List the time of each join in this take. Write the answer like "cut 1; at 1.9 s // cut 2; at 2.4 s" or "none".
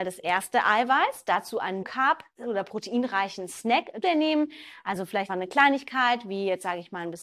cut 1; at 1.8 s // cut 2; at 4.0 s // cut 3; at 5.3 s

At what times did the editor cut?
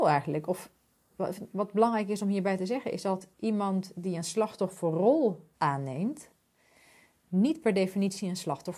cut 1; at 3.3 s // cut 2; at 5.5 s

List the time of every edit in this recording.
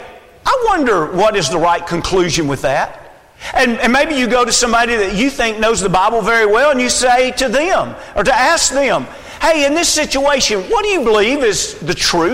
none

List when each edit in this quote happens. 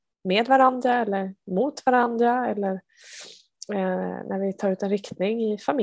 none

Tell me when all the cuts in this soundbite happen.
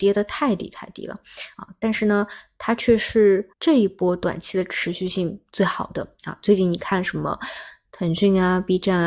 cut 1; at 3.5 s

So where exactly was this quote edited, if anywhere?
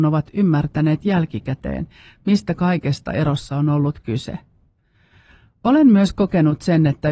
none

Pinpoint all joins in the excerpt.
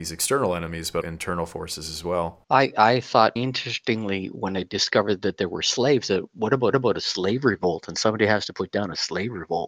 cut 1; at 1.0 s // cut 2; at 2.4 s // cut 3; at 3.4 s // cut 4; at 6.7 s

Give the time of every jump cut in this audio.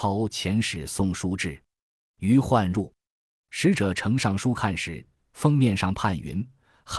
none

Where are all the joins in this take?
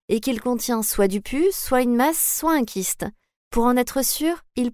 none

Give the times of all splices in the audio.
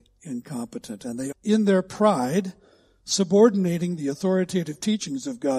cut 1; at 1.3 s

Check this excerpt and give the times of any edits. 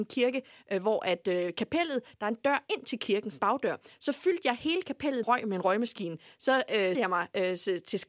cut 1; at 3.4 s // cut 2; at 5.2 s // cut 3; at 6.9 s

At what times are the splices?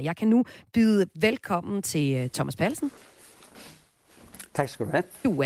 none

